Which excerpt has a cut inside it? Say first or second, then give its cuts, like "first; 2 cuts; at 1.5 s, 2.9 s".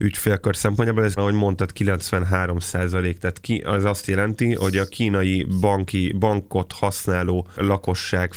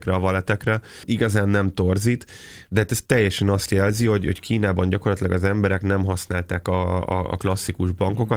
first; 1 cut; at 1.2 s